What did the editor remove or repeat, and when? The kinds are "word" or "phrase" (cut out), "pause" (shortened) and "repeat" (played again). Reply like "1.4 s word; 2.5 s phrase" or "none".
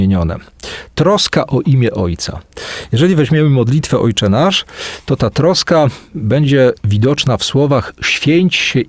none